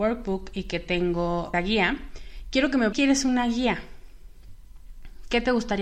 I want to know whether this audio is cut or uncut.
cut